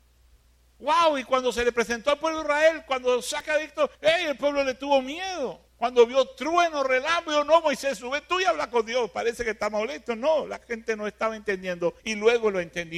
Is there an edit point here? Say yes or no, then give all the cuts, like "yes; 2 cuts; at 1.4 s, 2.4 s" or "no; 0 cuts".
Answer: yes; 3 cuts; at 3.9 s, 5.7 s, 12.0 s